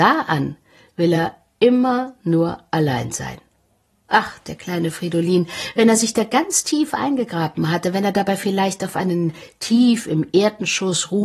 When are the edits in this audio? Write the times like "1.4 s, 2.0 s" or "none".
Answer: none